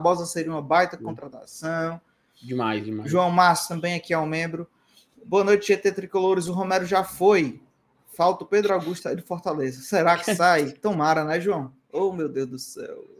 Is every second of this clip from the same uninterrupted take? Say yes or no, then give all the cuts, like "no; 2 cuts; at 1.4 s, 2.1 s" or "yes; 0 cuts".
yes; 0 cuts